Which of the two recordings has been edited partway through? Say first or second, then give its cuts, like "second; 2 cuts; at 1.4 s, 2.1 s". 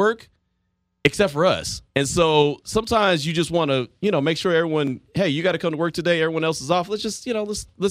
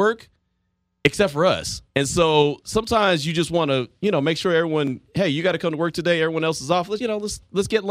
second; 1 cut; at 7.0 s